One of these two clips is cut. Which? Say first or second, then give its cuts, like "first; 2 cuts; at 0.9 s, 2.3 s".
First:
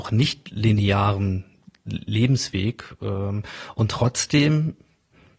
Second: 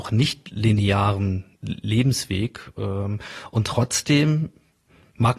second; 1 cut; at 1.5 s